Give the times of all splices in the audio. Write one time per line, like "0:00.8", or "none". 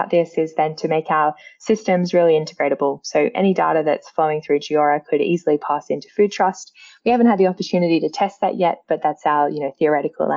none